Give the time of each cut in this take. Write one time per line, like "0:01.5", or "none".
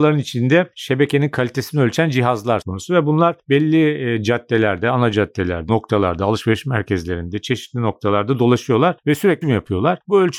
0:02.6
0:05.7
0:09.4